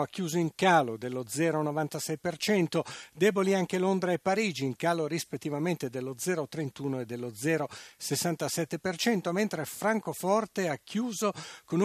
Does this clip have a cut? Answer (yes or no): no